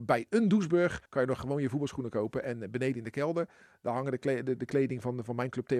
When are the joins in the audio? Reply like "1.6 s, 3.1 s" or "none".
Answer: 1.1 s